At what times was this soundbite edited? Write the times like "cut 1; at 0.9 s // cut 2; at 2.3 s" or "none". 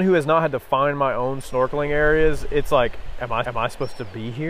cut 1; at 3.4 s